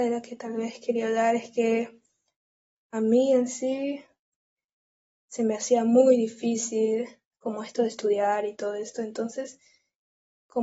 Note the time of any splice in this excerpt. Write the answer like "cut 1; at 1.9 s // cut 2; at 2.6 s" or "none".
cut 1; at 7.3 s